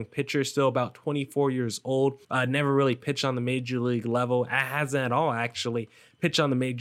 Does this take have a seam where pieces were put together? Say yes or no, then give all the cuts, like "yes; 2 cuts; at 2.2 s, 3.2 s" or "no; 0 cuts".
yes; 1 cut; at 2.2 s